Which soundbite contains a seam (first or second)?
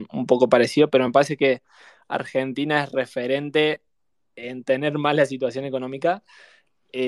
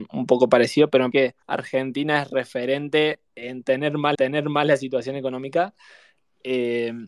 second